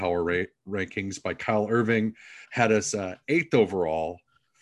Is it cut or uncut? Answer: cut